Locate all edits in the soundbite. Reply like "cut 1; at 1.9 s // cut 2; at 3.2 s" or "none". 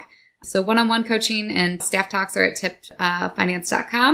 cut 1; at 1.8 s